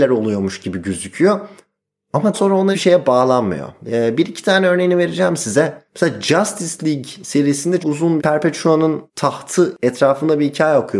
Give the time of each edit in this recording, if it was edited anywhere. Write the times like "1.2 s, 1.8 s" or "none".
2.3 s, 2.7 s, 5.9 s, 7.8 s, 8.2 s, 9.1 s